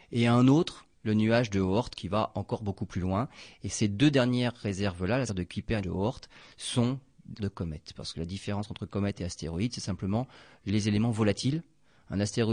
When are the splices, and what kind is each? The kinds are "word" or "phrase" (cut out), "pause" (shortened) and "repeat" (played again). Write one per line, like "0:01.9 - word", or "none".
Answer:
0:00.9 - pause
0:05.3 - word
0:05.8 - word
0:07.4 - phrase